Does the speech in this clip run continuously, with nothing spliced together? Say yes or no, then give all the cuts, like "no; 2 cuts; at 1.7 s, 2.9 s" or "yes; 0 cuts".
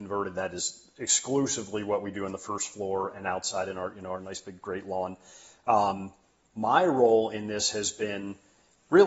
yes; 0 cuts